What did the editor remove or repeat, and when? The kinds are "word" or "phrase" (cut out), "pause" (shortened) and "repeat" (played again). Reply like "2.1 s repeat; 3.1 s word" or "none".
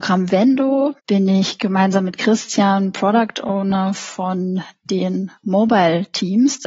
1.0 s pause; 5.4 s pause